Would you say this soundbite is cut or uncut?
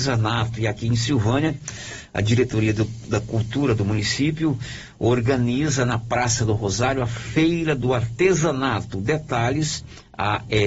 uncut